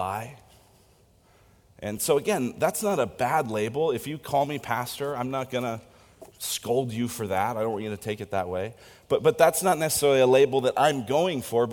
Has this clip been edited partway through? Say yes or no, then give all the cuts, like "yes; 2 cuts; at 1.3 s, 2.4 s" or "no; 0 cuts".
no; 0 cuts